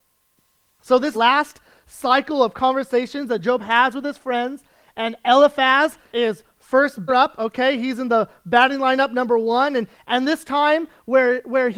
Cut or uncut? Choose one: cut